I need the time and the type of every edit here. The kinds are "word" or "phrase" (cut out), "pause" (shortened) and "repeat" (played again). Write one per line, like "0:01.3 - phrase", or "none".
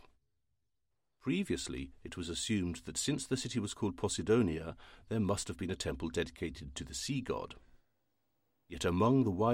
none